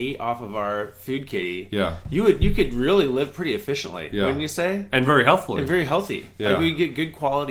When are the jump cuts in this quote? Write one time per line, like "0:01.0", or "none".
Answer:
none